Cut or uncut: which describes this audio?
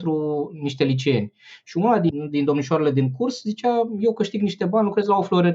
uncut